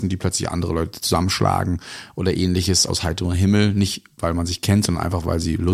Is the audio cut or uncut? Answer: cut